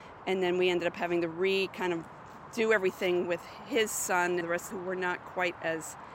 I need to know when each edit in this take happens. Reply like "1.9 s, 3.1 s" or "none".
4.4 s, 4.7 s